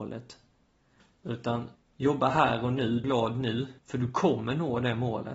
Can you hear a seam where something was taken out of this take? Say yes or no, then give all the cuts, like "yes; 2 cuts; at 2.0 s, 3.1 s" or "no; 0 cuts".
yes; 3 cuts; at 1.8 s, 3.0 s, 3.8 s